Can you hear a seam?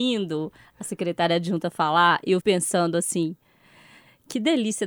yes; 1 cut; at 2.4 s

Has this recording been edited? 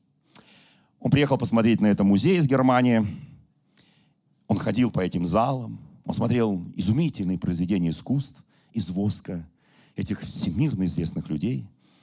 no; 0 cuts

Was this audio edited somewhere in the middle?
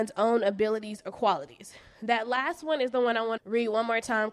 yes; 1 cut; at 3.4 s

